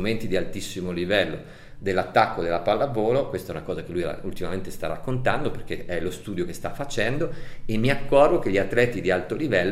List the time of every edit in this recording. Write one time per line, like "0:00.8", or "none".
none